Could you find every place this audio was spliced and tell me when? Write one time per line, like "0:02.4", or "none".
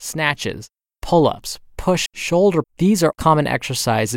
0:02.1
0:02.6
0:03.1